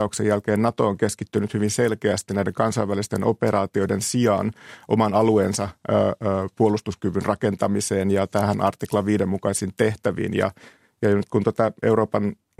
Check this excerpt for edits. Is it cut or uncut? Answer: uncut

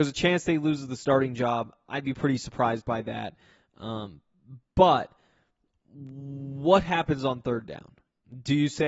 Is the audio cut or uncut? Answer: uncut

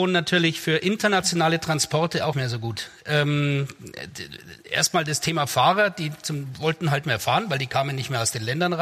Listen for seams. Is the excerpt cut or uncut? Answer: cut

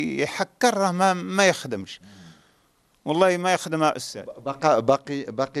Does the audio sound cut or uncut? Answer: uncut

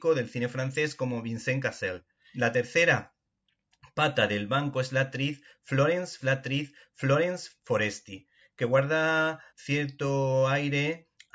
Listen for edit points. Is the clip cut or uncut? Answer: cut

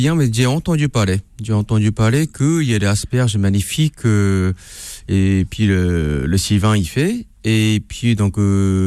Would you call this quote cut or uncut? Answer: uncut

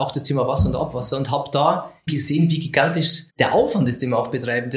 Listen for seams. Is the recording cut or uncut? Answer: cut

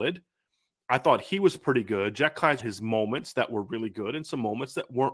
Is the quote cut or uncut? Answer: cut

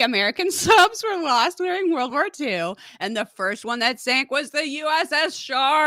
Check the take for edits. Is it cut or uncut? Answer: uncut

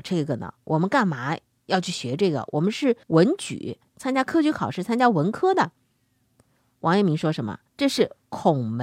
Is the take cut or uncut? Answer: cut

